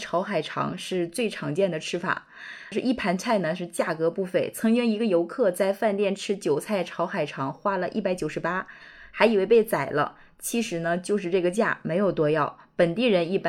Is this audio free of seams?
no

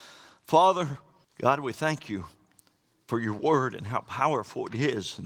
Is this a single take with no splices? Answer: no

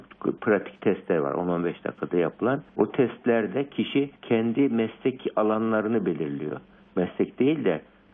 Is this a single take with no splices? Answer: no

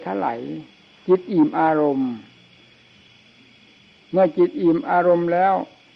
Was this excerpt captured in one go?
yes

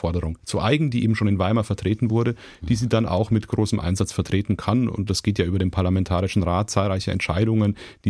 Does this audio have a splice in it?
no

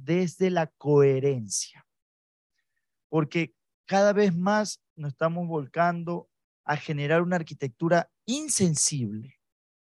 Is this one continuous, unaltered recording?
yes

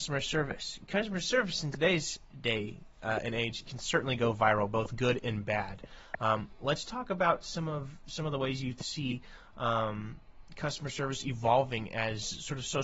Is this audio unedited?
yes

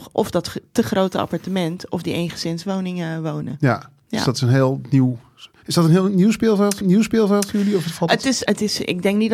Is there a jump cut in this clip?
yes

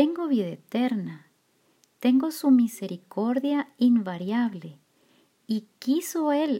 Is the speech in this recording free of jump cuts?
yes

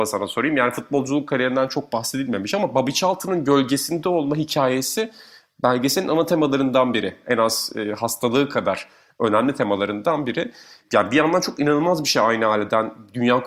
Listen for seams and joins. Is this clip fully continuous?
yes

